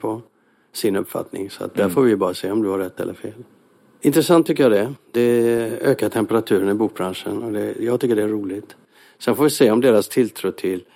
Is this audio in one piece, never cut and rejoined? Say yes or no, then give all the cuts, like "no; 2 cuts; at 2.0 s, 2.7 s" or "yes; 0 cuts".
yes; 0 cuts